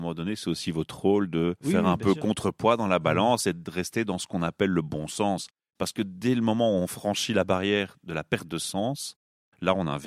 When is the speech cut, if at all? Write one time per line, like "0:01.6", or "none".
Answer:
none